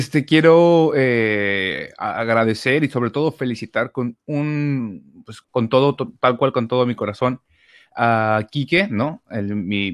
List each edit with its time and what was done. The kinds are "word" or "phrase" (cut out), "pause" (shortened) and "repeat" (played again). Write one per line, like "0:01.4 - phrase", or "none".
0:05.4 - pause